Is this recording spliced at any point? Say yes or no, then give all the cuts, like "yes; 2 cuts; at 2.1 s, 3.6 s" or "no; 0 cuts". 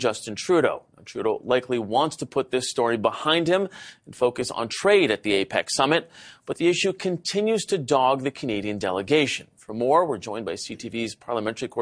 no; 0 cuts